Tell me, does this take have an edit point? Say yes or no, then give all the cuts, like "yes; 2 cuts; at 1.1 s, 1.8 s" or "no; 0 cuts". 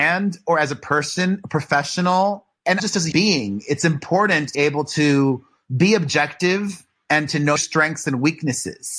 yes; 4 cuts; at 2.8 s, 3.1 s, 4.5 s, 7.6 s